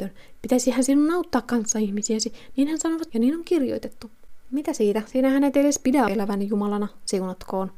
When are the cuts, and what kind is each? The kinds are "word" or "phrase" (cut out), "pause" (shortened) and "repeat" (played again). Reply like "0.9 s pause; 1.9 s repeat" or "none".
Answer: 3.1 s word; 6.1 s word